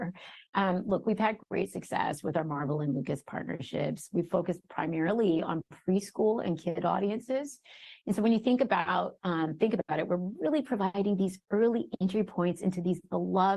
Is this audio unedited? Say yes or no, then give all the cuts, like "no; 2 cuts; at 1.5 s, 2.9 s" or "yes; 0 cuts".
yes; 0 cuts